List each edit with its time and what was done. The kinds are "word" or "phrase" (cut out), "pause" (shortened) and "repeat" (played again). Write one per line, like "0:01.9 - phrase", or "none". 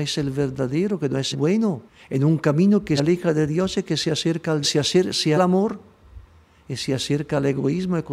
0:01.3 - word
0:01.9 - pause
0:03.0 - word
0:04.6 - phrase
0:05.4 - phrase